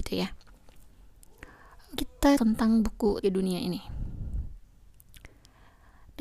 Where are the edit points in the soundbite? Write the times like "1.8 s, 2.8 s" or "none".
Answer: 2.0 s, 2.4 s, 3.2 s